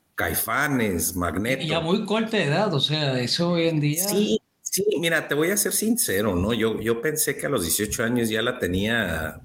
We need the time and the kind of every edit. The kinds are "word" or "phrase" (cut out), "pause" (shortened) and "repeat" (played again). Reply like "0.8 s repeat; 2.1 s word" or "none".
none